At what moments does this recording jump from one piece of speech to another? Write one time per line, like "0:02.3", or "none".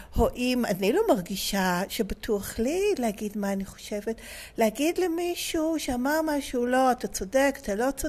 none